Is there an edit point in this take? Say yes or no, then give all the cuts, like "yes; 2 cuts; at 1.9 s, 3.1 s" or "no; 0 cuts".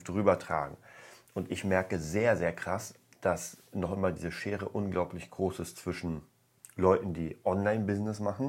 no; 0 cuts